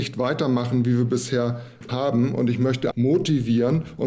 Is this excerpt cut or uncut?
cut